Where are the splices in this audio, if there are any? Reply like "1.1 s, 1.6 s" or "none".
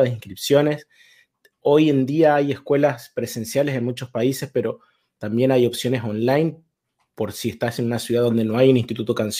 none